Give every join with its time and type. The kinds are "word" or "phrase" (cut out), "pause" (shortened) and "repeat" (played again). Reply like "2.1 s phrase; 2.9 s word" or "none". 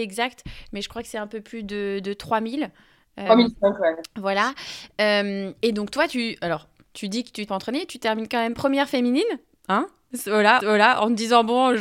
3.3 s word; 7.5 s phrase; 10.6 s repeat